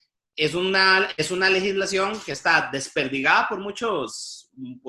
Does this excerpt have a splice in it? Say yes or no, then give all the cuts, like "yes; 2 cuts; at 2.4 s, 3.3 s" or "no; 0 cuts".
no; 0 cuts